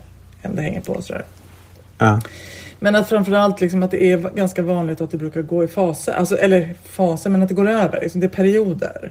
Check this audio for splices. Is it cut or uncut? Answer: uncut